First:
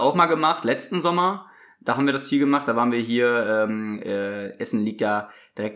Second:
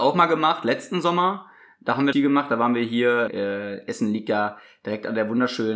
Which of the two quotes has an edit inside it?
second; 2 cuts; at 2.1 s, 3.3 s

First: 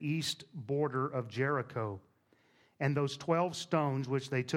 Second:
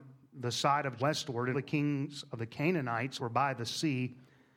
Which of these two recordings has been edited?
second; 3 cuts; at 1.0 s, 1.5 s, 3.2 s

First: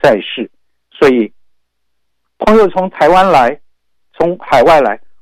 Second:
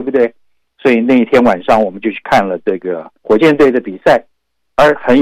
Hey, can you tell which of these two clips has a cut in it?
second; 1 cut; at 3.2 s

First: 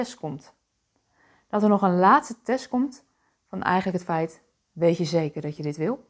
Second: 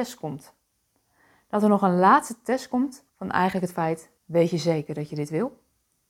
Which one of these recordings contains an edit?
second; 2 cuts; at 3.1 s, 4.2 s

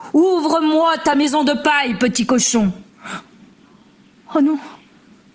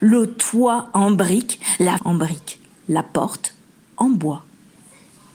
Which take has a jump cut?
second; 1 cut; at 2.0 s

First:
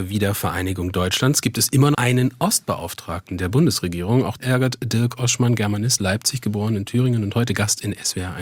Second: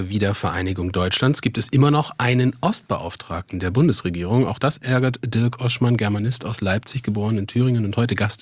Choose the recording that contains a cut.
first; 3 cuts; at 1.9 s, 4.4 s, 6.0 s

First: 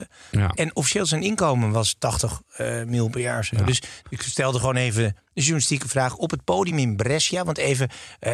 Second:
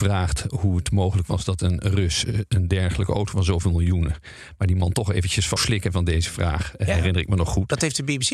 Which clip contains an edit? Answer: second; 1 cut; at 5.6 s

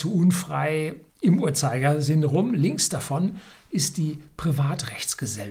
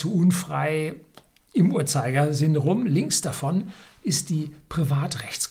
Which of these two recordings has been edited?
first; 1 cut; at 1.1 s

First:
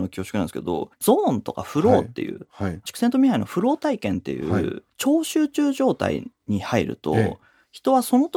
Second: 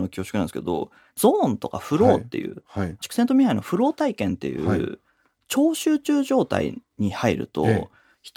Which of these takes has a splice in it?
first; 2 cuts; at 0.9 s, 4.9 s

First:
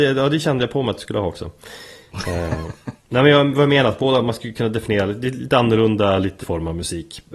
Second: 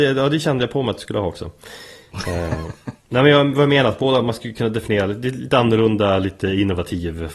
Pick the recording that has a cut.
first; 1 cut; at 6.4 s

